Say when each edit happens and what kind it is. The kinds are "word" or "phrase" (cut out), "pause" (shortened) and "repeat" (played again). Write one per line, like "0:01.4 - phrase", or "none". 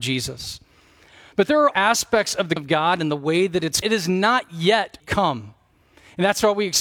0:01.7 - word
0:02.6 - word
0:03.8 - phrase
0:05.0 - word